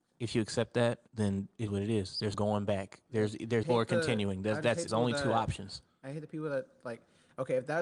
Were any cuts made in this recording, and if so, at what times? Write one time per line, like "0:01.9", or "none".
0:01.1
0:01.7
0:02.3
0:03.6
0:04.9